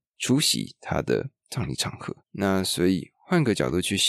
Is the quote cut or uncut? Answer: cut